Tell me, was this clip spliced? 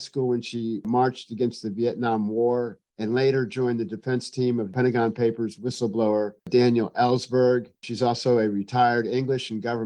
yes; 1 cut; at 7.8 s

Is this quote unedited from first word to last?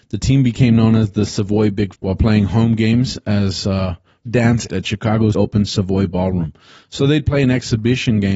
no; 4 cuts; at 1.9 s, 4.3 s, 4.7 s, 5.3 s

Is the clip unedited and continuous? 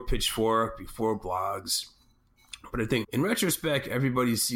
no; 1 cut; at 3.0 s

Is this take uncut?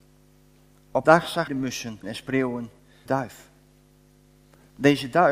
no; 4 cuts; at 1.0 s, 1.5 s, 2.0 s, 3.1 s

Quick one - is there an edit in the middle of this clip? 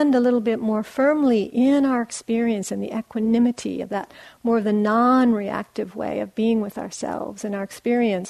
no; 0 cuts

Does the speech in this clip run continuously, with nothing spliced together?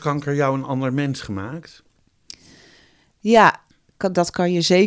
yes; 0 cuts

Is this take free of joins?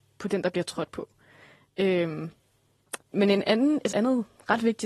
no; 2 cuts; at 3.1 s, 3.9 s

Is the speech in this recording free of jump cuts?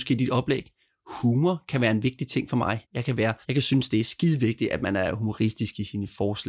no; 2 cuts; at 2.8 s, 3.4 s

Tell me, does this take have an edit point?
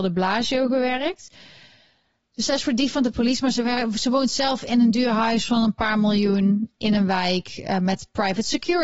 no; 0 cuts

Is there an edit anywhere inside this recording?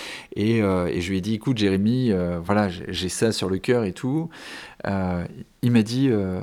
no; 0 cuts

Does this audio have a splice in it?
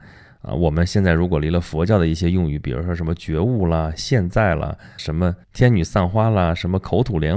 yes; 2 cuts; at 5.0 s, 5.4 s

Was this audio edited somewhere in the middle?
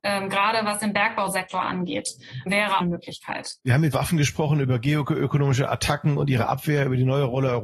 yes; 4 cuts; at 2.5 s, 2.8 s, 3.6 s, 3.9 s

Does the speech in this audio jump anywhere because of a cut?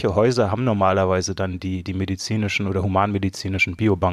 no; 0 cuts

